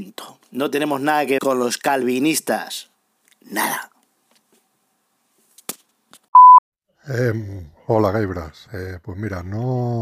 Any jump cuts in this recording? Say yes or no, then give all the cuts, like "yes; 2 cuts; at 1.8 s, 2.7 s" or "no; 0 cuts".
yes; 1 cut; at 1.4 s